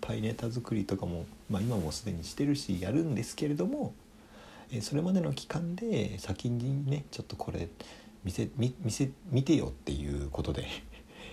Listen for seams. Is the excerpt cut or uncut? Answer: uncut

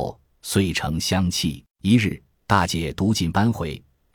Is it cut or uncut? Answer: cut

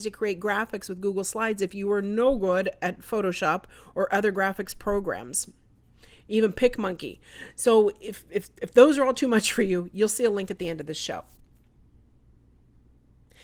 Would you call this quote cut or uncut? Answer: uncut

